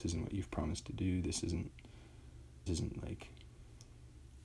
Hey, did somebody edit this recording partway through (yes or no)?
yes